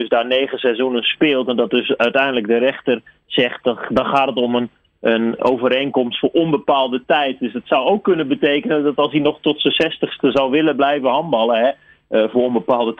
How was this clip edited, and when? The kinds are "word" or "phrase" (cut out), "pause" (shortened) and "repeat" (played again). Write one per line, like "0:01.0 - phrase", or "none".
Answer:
none